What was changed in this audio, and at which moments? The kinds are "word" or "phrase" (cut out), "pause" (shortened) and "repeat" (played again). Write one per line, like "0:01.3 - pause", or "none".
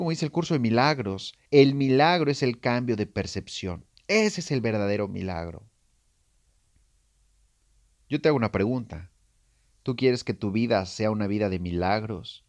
0:01.5 - pause